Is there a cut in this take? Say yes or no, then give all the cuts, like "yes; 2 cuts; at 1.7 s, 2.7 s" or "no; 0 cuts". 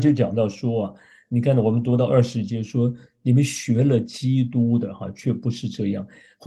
no; 0 cuts